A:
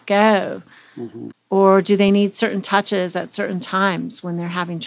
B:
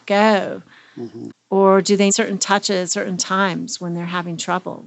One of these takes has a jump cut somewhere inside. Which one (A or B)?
B